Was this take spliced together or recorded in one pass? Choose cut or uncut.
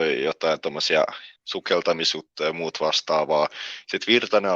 cut